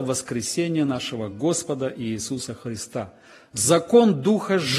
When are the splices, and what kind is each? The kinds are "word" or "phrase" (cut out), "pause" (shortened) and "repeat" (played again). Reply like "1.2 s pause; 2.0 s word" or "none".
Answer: none